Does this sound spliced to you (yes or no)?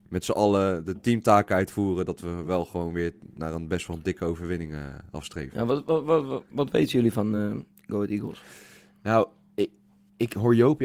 no